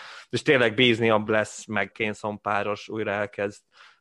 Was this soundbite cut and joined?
yes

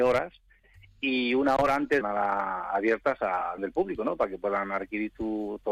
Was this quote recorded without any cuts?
no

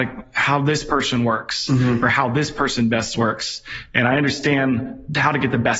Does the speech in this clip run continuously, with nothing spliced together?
yes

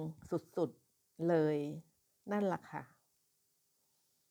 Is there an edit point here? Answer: no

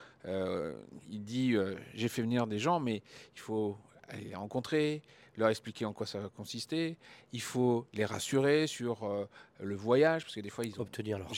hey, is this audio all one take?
yes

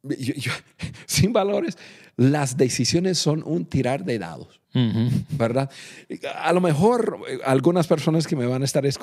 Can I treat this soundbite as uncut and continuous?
no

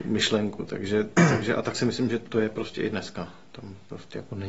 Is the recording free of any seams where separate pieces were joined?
yes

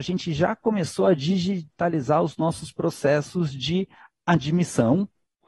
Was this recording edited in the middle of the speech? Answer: no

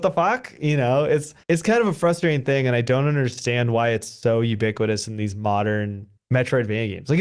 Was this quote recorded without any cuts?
no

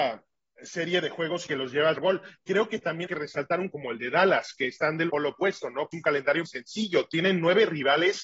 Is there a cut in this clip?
yes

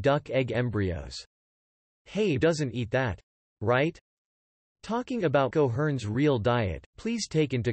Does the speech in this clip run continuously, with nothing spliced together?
no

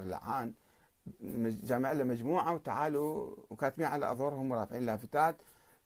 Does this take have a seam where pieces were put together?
no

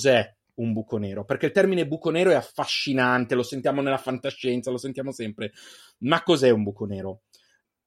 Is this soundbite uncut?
yes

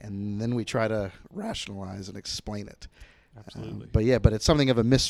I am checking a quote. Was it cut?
no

